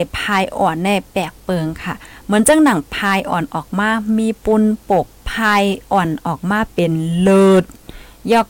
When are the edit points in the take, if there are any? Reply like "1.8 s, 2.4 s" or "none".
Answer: 5.1 s